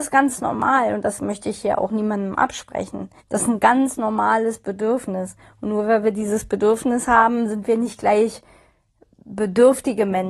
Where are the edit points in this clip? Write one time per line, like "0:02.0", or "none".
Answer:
0:03.2